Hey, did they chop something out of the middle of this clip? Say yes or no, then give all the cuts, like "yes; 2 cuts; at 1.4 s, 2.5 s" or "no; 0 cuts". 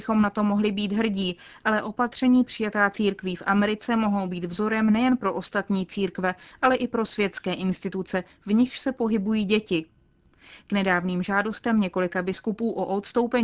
no; 0 cuts